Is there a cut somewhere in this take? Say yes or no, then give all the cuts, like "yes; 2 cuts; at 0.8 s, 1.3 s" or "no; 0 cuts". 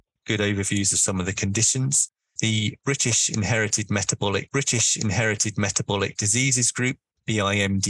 yes; 1 cut; at 4.5 s